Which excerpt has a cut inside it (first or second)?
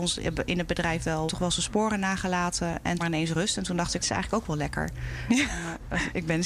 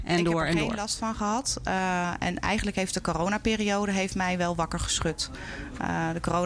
first